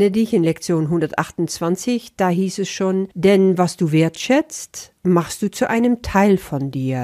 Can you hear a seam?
yes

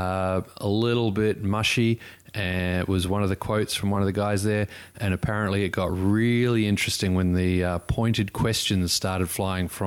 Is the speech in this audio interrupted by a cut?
no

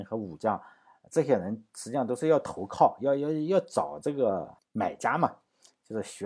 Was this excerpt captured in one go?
no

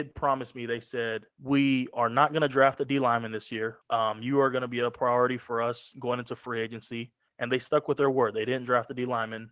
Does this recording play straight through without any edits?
no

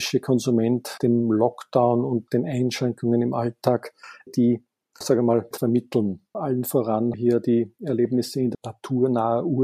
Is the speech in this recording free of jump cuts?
no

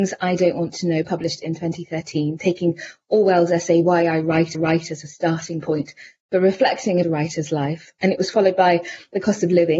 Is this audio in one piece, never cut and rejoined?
no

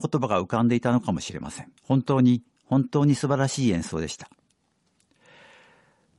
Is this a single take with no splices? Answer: no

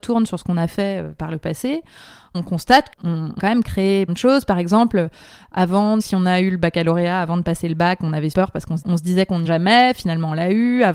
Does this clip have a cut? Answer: yes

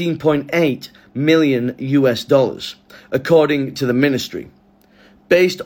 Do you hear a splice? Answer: no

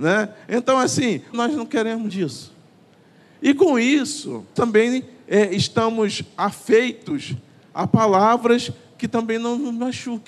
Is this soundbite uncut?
no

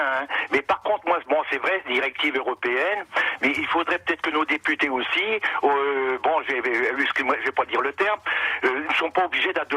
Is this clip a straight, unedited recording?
yes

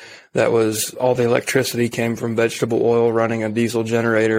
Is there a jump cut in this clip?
no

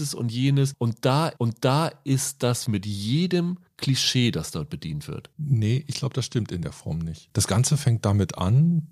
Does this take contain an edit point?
yes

